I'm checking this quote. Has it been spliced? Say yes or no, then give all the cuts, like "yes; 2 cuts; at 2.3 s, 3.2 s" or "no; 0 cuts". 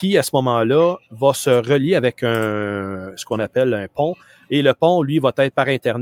no; 0 cuts